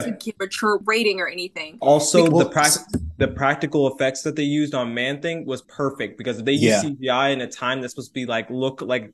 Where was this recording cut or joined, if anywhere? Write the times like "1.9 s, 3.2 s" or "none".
none